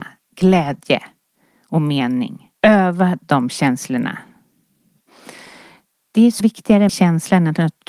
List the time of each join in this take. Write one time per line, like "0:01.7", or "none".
0:02.6
0:06.4
0:06.9